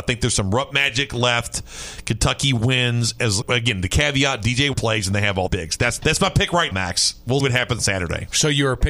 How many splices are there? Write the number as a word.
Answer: seven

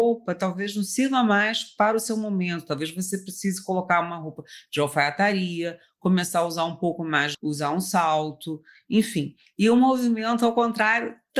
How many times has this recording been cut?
one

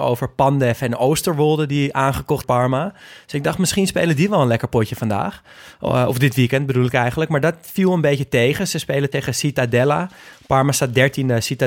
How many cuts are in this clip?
two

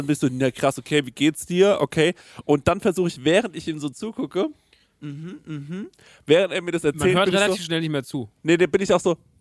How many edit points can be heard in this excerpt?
zero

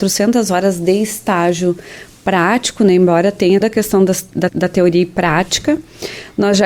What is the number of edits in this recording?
two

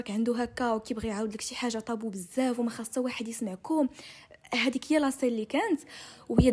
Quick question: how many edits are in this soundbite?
zero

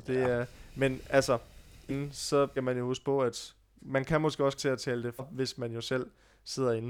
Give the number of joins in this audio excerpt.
five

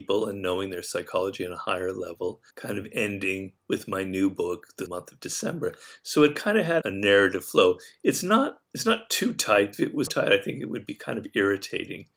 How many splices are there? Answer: seven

